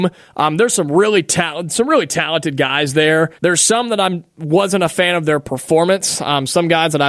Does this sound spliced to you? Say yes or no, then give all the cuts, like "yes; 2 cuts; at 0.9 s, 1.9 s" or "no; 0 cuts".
yes; 1 cut; at 3.4 s